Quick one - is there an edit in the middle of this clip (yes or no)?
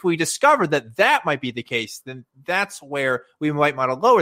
no